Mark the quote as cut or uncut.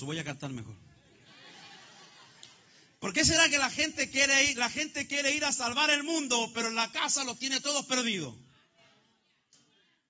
uncut